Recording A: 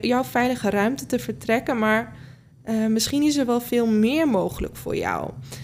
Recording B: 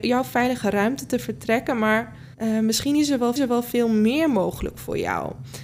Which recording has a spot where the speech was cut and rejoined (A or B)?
B